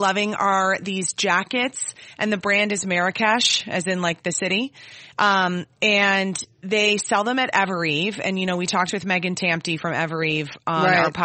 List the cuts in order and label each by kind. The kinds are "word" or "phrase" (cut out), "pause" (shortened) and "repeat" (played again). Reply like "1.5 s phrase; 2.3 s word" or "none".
6.5 s pause